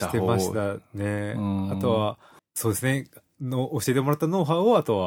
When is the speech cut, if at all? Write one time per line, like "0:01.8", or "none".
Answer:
0:02.4